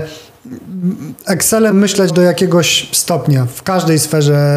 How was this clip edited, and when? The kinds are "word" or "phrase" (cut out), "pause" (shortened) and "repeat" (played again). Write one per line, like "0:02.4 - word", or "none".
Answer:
0:01.7 - word
0:02.1 - word